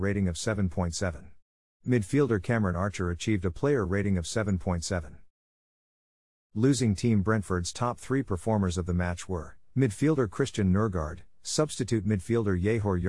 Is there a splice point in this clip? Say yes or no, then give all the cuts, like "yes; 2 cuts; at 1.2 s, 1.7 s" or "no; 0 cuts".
no; 0 cuts